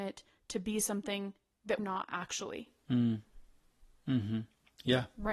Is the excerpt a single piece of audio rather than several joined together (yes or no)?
no